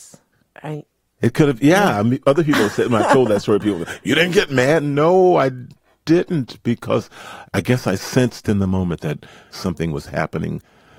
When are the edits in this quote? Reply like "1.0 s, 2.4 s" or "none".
none